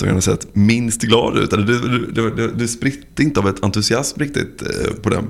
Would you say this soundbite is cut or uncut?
uncut